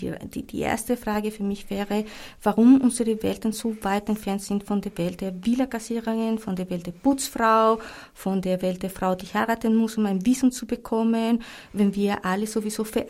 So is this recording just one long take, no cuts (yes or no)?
yes